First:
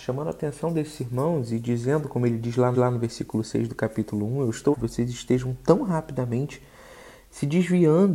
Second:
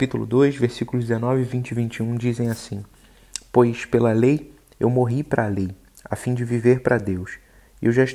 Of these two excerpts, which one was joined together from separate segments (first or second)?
first